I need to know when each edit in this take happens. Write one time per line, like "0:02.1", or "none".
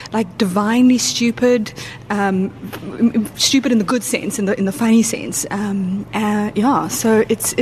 none